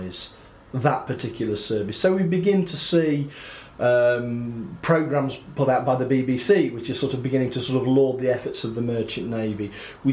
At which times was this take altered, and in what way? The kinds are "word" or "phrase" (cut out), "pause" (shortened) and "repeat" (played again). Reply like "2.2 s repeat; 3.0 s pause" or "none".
none